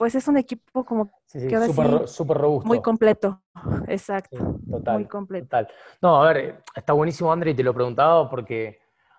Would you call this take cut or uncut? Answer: uncut